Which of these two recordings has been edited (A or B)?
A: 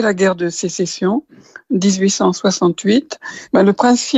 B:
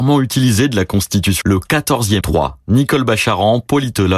B